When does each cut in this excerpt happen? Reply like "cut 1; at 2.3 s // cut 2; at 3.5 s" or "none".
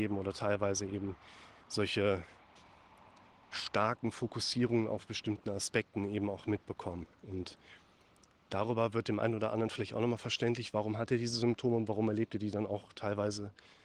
cut 1; at 7.1 s